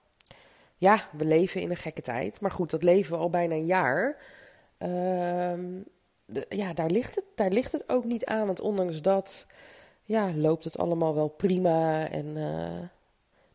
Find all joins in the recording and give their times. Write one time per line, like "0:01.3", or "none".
none